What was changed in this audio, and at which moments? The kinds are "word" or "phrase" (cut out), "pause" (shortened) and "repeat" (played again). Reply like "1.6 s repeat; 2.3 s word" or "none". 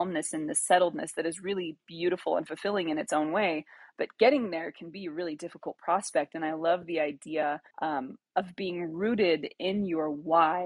7.7 s pause

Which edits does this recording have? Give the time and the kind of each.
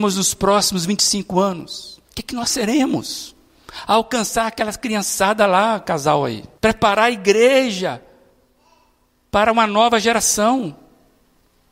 2.0 s pause; 6.6 s pause

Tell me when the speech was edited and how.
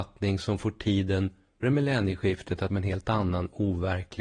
1.6 s word; 2.7 s phrase

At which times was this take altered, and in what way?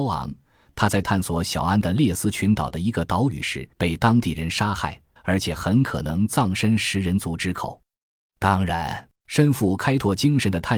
3.7 s pause; 5.2 s pause; 9.2 s pause

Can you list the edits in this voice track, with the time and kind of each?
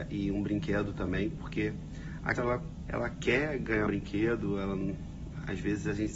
2.4 s word; 2.9 s word; 3.9 s word

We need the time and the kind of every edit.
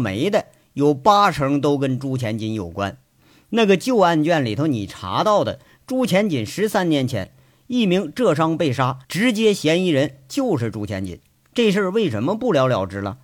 9.0 s pause

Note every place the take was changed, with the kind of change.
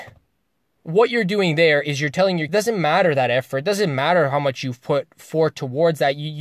2.5 s word

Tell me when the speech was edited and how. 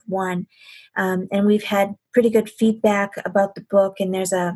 none

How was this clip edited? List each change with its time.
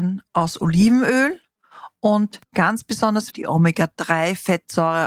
2.4 s pause; 3.3 s word

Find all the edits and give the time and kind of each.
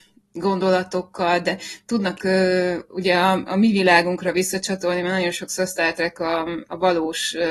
2.2 s phrase

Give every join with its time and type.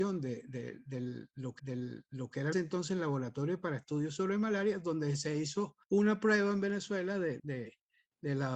1.6 s repeat; 2.5 s word; 5.8 s pause; 7.4 s word

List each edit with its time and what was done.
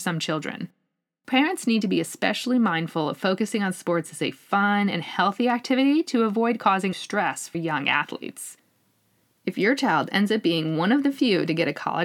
6.9 s word; 7.5 s word

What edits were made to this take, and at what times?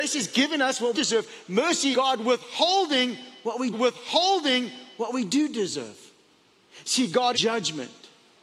0.9 s phrase; 1.9 s word; 3.7 s repeat; 7.3 s phrase

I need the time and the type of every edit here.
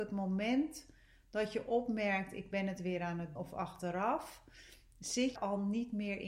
3.4 s word; 5.4 s word

